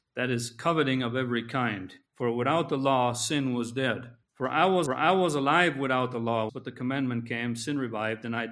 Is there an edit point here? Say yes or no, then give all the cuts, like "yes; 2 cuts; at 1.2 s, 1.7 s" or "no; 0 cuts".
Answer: yes; 4 cuts; at 2.1 s, 4.2 s, 4.9 s, 6.5 s